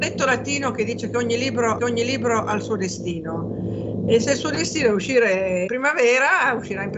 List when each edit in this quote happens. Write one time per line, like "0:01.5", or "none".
0:01.8
0:05.7